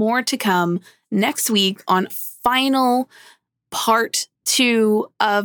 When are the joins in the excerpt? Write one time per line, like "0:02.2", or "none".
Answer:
0:02.1
0:04.3

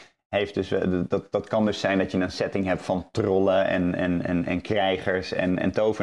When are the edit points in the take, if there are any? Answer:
none

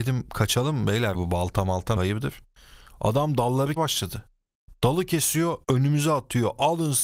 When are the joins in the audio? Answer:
0:01.1
0:02.0
0:03.8
0:05.6

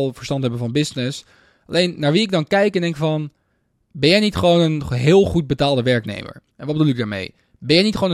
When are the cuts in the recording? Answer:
0:06.5

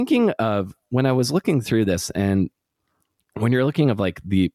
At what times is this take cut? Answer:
none

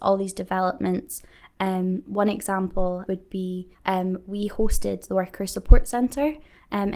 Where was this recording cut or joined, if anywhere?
0:03.1
0:03.7

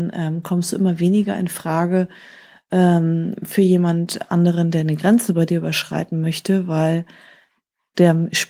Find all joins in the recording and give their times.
none

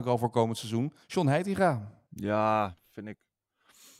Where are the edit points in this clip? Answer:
0:01.0
0:02.1

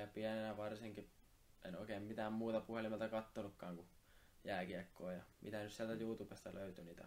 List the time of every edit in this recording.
none

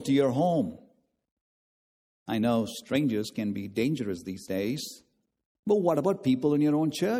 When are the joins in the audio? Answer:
none

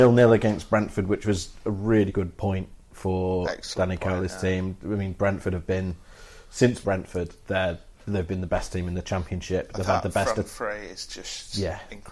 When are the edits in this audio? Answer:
0:02.1
0:06.8

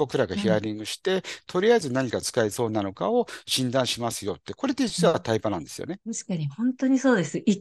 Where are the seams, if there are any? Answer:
0:06.0

